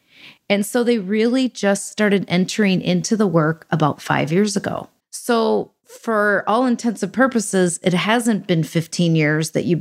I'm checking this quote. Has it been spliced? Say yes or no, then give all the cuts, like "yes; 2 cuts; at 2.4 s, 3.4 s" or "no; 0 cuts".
yes; 1 cut; at 5.0 s